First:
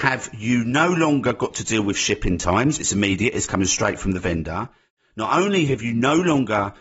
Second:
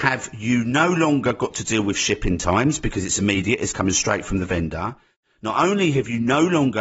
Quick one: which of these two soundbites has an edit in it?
first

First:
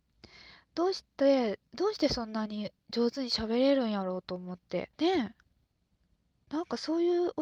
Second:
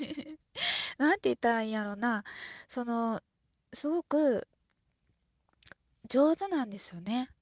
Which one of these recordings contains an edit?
first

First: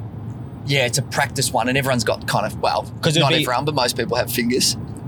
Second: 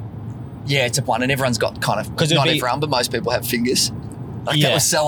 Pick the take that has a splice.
second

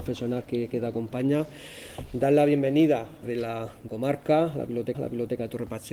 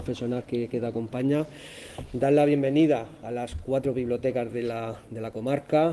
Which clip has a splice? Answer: first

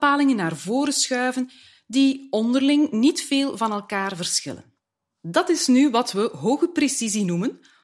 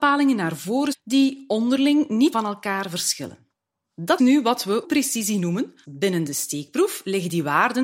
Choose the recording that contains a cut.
second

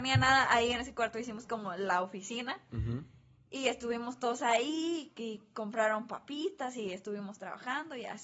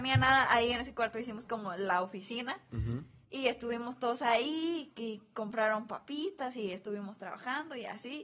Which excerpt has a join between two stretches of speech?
second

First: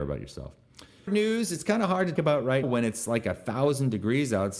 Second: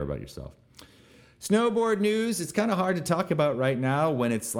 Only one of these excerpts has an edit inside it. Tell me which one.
first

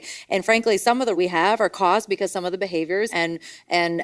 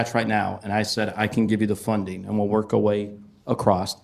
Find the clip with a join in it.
first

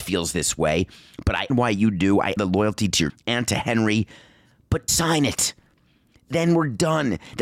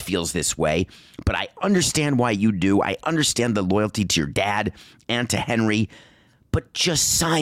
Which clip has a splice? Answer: first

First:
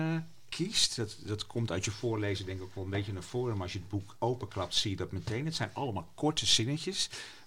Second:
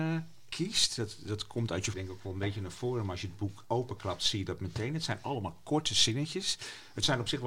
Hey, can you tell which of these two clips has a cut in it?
second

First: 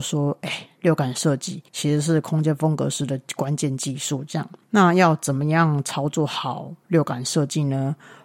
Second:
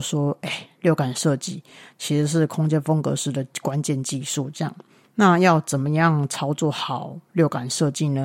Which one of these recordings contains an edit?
first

